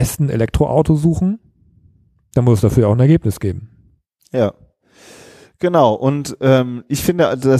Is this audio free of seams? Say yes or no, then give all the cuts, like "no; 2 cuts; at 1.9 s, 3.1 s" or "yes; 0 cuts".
yes; 0 cuts